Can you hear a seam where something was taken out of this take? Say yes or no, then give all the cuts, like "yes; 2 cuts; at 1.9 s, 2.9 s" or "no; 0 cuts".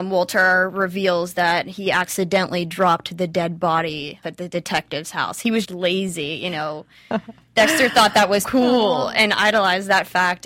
yes; 3 cuts; at 4.2 s, 5.6 s, 8.4 s